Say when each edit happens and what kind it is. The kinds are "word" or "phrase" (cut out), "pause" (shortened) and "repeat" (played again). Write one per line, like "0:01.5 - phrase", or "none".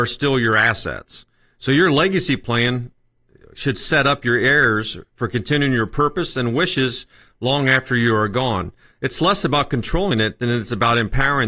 none